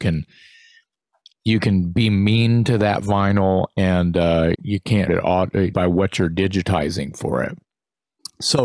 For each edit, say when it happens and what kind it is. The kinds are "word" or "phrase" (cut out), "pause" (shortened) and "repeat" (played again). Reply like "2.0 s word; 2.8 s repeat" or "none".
4.5 s word; 5.1 s word; 5.7 s word